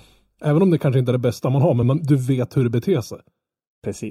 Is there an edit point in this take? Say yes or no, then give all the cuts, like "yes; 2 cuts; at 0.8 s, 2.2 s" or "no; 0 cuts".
no; 0 cuts